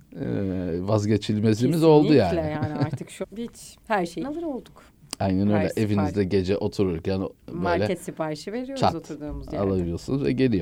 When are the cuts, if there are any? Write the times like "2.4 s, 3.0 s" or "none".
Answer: 3.2 s, 4.2 s